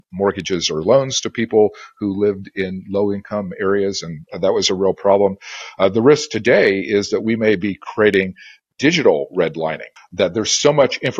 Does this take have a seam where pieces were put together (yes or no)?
yes